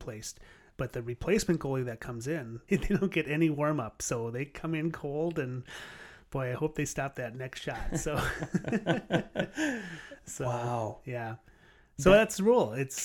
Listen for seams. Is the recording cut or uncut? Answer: cut